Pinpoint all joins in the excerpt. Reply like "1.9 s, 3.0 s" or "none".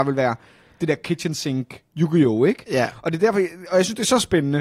1.9 s